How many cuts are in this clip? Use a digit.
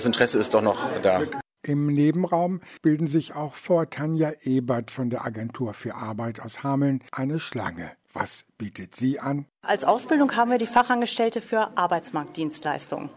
0